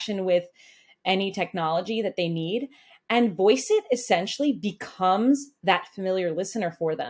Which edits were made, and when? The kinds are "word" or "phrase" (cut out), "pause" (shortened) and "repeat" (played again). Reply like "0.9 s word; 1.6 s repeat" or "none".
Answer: none